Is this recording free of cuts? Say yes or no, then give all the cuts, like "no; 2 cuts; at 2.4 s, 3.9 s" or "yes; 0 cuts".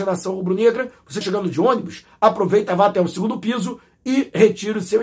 no; 1 cut; at 1.2 s